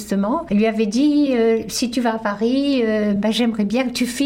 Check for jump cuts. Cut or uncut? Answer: uncut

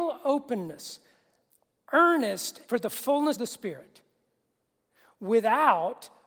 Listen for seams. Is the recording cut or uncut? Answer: cut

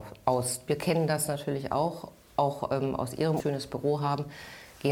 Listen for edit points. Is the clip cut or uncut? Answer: cut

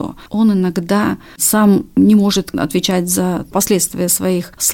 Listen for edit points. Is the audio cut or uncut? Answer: uncut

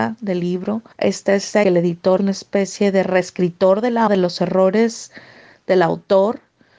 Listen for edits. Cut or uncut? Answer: cut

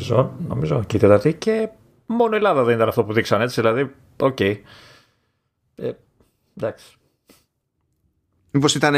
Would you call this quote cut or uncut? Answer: uncut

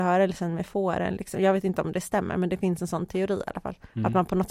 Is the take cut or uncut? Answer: uncut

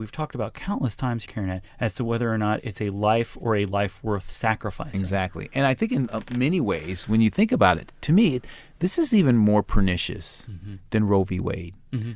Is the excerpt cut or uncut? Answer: cut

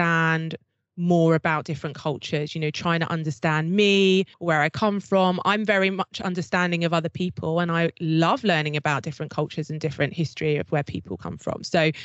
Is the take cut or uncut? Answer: cut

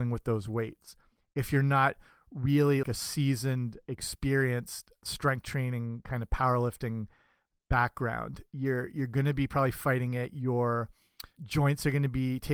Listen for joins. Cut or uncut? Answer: cut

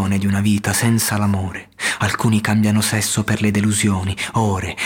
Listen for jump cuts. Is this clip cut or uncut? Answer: uncut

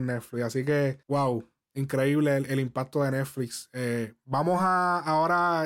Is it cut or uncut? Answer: uncut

